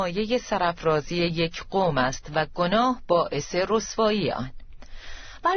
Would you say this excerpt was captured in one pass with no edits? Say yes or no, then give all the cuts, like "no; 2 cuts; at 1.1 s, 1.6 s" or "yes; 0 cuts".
yes; 0 cuts